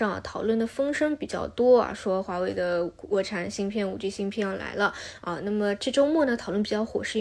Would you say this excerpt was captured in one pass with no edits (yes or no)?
yes